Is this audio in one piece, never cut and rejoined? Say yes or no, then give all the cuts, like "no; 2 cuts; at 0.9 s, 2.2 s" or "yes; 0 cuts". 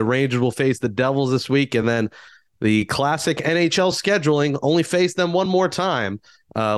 yes; 0 cuts